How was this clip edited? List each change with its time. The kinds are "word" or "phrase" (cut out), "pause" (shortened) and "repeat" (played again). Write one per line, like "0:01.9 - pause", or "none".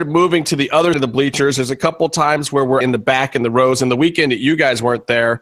0:00.9 - word
0:02.8 - word